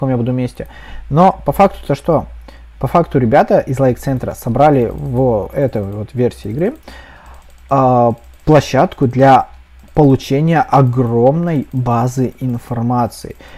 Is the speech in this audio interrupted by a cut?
no; 0 cuts

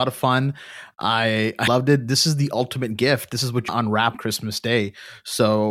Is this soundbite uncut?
no; 3 cuts; at 1.7 s, 3.7 s, 4.1 s

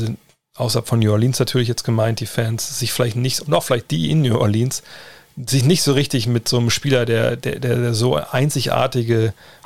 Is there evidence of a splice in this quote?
no; 0 cuts

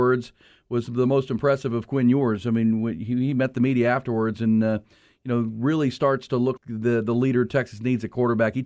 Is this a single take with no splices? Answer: no; 1 cut; at 6.6 s

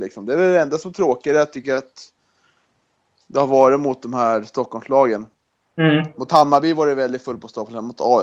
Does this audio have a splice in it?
no; 0 cuts

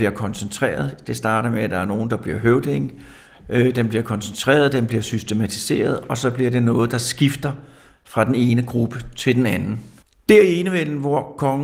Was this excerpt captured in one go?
yes; 0 cuts

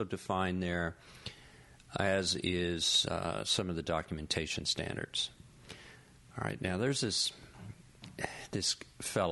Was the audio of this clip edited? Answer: no; 0 cuts

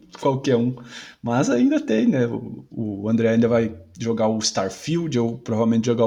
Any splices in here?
no; 0 cuts

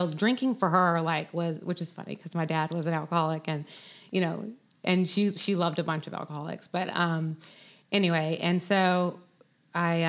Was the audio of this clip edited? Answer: no; 0 cuts

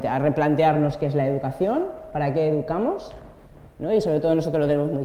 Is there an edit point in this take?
no; 0 cuts

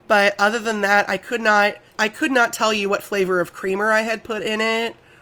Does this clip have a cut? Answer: yes; 1 cut; at 1.9 s

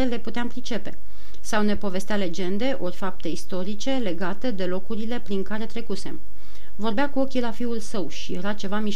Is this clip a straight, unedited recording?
yes; 0 cuts

